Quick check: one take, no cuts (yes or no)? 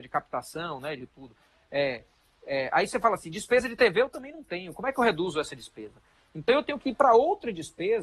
yes